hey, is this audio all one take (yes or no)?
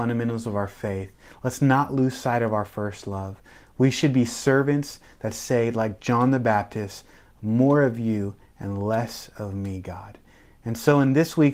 yes